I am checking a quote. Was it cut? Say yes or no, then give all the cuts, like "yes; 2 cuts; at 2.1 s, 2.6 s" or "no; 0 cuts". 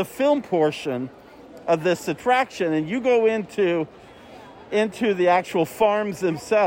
no; 0 cuts